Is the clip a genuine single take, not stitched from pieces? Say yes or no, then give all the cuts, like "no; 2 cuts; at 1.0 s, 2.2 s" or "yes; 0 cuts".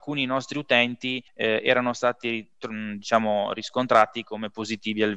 no; 1 cut; at 1.3 s